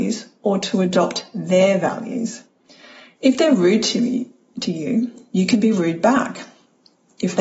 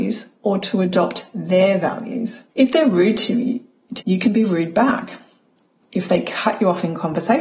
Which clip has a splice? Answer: second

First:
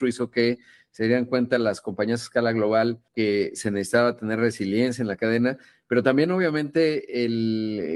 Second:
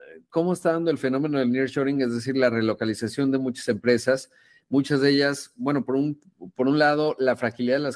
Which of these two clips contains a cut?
first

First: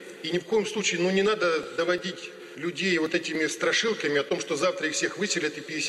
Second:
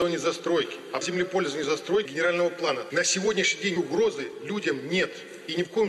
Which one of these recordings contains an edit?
second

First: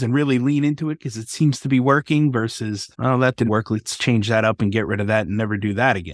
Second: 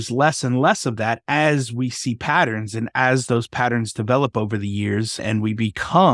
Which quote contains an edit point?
first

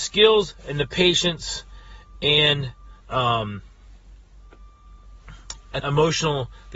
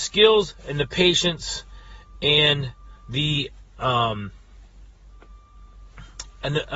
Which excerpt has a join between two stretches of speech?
first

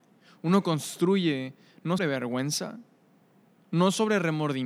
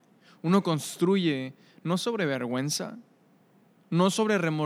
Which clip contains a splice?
first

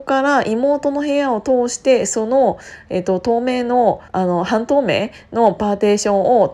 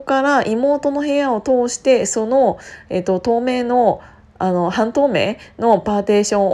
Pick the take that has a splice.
first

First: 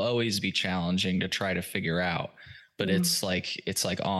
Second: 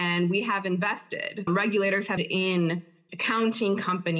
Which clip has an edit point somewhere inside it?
second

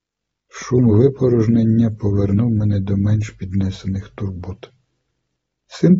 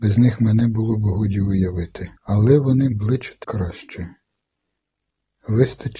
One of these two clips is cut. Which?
second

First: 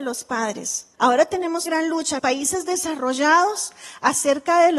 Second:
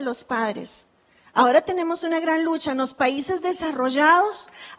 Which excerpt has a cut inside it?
first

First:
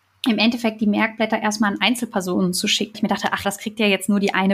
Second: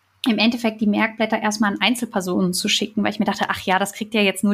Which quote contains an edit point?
first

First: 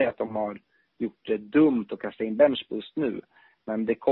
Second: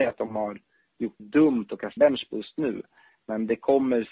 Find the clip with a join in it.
second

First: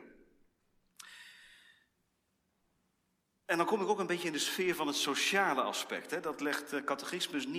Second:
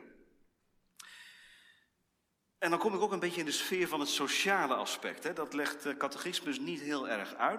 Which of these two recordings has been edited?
second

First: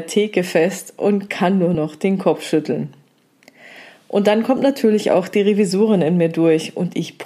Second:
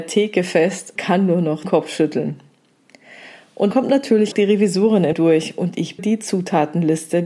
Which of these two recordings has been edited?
second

